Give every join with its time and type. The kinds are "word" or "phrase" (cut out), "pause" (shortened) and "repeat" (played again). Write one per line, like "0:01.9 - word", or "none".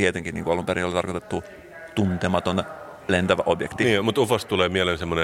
none